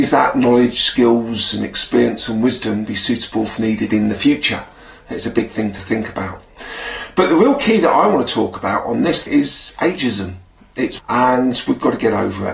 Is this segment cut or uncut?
cut